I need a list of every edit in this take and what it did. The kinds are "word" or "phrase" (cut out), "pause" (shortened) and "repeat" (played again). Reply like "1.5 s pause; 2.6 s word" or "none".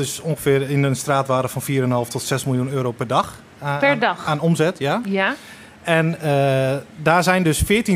none